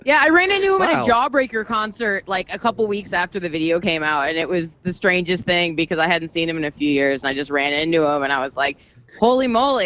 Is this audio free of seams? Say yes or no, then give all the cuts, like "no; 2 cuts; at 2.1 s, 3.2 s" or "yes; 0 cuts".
yes; 0 cuts